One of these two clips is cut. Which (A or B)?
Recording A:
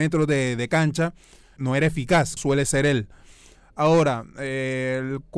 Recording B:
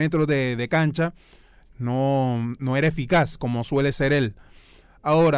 A